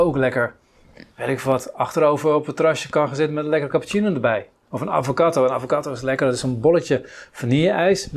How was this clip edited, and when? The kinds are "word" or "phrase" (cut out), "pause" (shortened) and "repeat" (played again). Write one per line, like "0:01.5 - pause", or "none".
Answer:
none